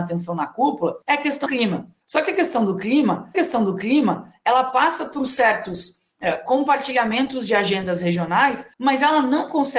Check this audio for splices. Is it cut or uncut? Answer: cut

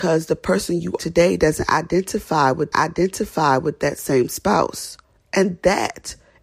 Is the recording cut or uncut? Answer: cut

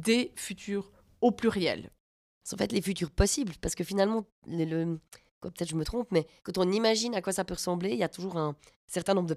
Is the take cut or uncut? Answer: cut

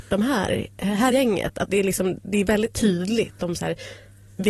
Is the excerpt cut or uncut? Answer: cut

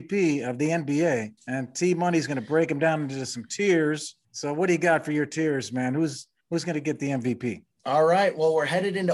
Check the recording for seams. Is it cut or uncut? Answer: cut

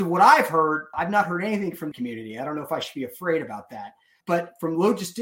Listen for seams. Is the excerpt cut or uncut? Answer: cut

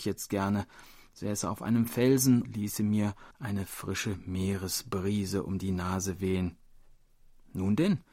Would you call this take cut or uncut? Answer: cut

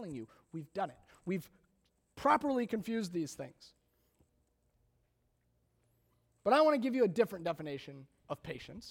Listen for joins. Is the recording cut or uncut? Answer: uncut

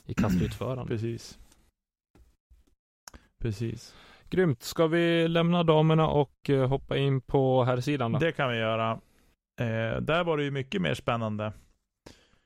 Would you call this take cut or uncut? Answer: uncut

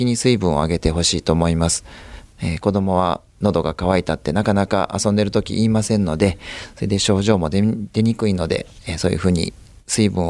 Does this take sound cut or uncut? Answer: uncut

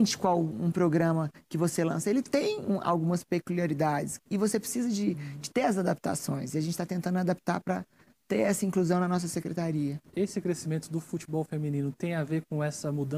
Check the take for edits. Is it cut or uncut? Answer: uncut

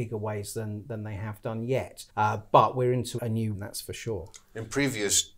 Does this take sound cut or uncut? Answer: cut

